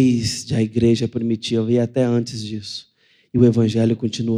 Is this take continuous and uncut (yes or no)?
yes